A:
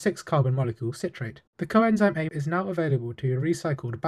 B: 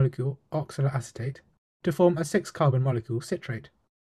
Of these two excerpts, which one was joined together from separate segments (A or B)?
A